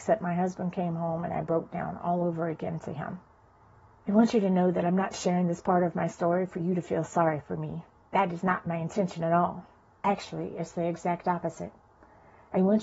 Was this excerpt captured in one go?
yes; 0 cuts

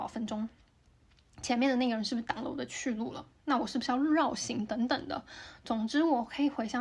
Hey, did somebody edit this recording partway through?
no; 0 cuts

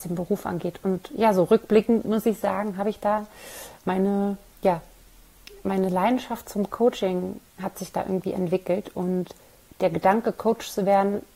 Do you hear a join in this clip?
no; 0 cuts

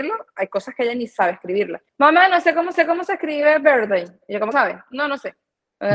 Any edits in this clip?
yes; 3 cuts; at 1.9 s, 2.7 s, 4.5 s

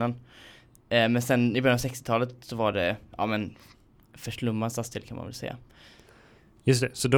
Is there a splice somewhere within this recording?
no; 0 cuts

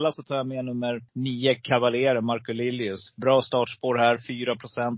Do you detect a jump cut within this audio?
yes; 1 cut; at 1.1 s

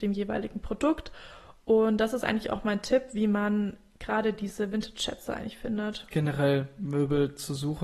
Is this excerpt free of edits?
yes; 0 cuts

